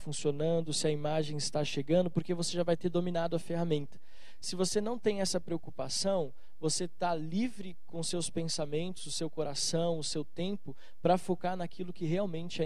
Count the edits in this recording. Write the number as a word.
zero